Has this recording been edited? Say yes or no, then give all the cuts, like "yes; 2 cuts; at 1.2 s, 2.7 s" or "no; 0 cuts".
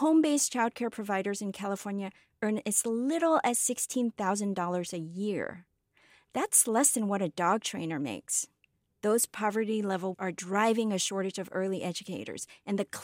yes; 1 cut; at 10.1 s